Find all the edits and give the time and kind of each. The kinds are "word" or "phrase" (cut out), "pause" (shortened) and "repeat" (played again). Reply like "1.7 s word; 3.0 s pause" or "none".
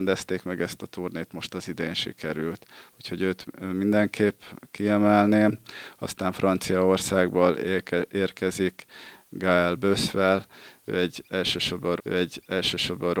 12.0 s repeat